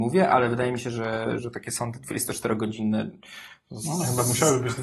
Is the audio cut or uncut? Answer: cut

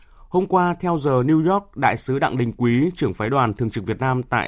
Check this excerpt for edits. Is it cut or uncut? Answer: uncut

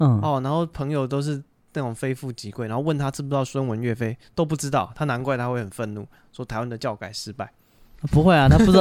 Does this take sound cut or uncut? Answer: uncut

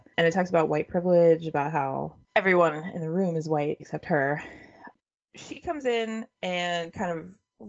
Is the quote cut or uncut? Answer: cut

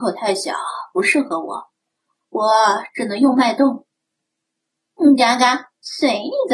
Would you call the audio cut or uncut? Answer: uncut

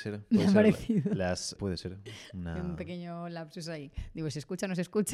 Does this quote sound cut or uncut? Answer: cut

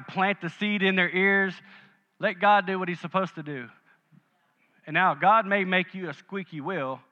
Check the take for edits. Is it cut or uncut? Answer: uncut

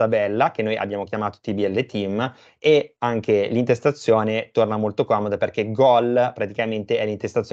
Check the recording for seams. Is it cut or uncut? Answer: uncut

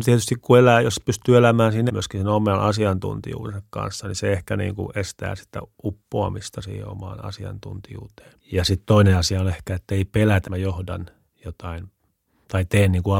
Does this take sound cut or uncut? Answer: cut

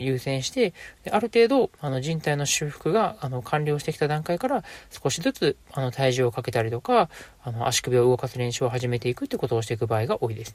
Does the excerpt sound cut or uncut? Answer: cut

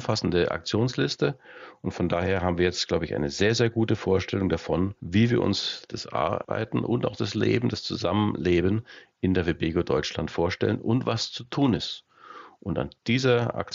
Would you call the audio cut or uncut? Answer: uncut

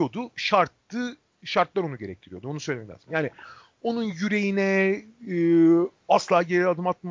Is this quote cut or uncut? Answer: uncut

